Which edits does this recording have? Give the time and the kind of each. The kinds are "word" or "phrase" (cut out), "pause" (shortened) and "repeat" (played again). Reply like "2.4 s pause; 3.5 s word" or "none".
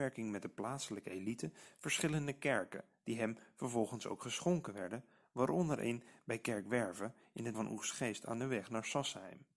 7.5 s word